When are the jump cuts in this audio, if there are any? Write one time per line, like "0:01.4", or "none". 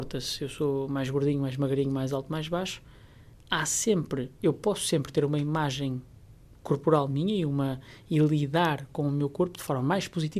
0:06.4